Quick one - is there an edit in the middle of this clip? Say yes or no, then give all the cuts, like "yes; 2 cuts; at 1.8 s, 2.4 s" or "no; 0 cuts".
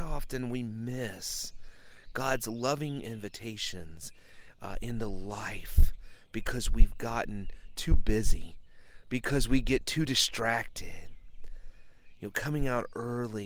no; 0 cuts